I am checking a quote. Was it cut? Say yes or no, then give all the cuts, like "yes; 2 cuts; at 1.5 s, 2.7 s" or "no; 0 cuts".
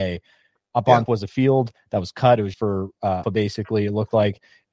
yes; 3 cuts; at 1.1 s, 2.5 s, 3.2 s